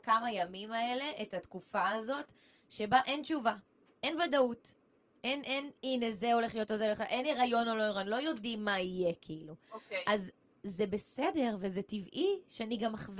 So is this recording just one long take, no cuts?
yes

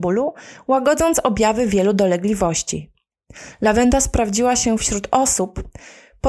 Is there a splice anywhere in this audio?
no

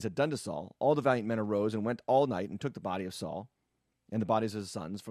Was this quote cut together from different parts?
no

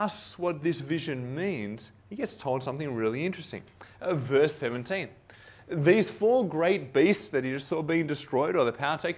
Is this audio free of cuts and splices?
no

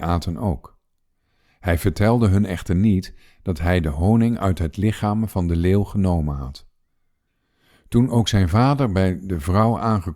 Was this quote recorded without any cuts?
yes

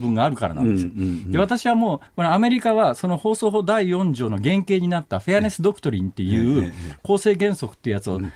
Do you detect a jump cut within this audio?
yes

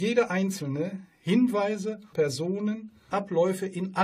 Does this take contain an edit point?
yes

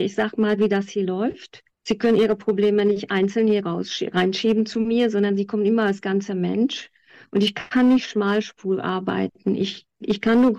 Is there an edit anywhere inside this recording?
no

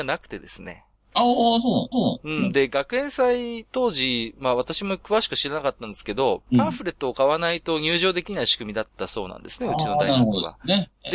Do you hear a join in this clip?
yes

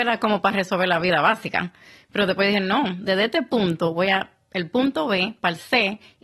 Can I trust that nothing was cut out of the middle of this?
yes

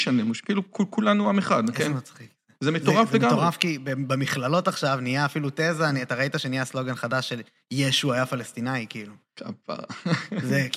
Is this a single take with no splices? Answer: yes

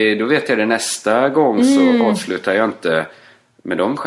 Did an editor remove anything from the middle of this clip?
no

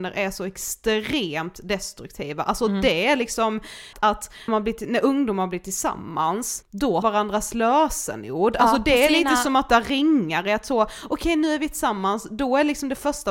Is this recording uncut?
no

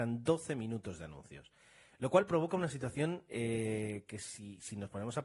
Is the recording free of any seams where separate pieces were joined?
yes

